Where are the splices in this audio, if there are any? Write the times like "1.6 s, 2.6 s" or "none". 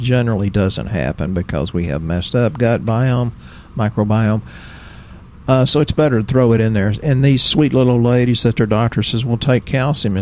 none